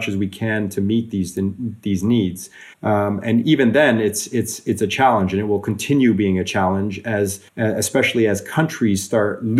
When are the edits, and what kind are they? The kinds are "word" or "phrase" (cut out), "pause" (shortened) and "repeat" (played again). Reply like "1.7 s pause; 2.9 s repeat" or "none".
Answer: 2.7 s pause; 7.5 s pause